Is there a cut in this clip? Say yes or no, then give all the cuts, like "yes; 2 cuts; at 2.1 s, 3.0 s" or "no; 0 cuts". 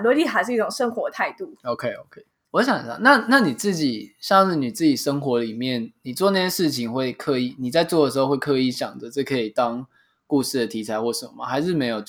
no; 0 cuts